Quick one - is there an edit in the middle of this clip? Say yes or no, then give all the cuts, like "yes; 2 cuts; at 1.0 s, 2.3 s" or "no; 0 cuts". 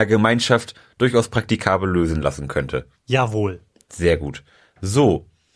no; 0 cuts